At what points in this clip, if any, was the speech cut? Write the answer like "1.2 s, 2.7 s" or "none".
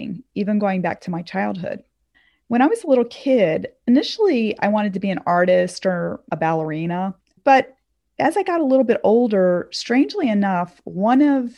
7.2 s